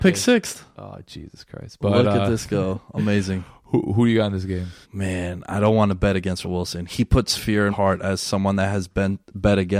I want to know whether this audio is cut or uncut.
cut